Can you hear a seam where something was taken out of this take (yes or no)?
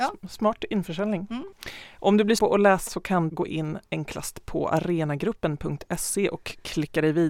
yes